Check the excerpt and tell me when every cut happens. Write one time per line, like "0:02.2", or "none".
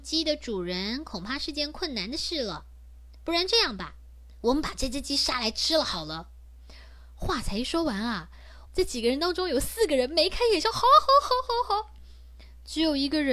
0:08.7

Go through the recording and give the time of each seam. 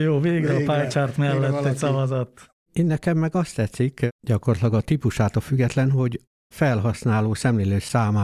none

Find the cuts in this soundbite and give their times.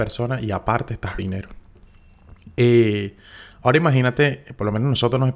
0:01.2

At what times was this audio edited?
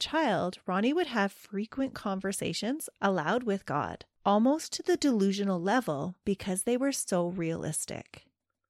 0:04.1

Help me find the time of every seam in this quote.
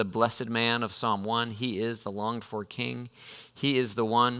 none

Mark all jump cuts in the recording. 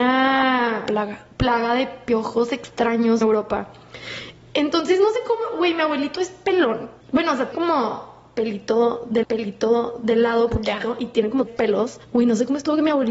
0:03.2
0:07.0
0:07.5
0:09.2
0:11.5
0:12.0

